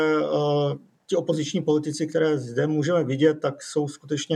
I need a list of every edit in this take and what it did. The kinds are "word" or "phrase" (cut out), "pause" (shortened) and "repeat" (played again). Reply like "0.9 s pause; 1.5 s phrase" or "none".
none